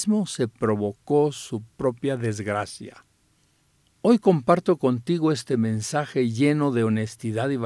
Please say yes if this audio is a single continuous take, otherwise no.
yes